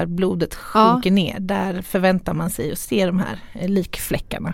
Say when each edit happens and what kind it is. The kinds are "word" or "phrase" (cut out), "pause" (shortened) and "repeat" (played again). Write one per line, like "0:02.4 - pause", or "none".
none